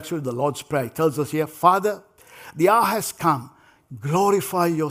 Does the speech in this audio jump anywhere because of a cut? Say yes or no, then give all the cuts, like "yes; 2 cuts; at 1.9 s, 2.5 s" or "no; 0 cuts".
no; 0 cuts